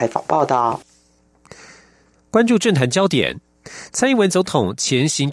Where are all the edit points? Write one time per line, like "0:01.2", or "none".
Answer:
none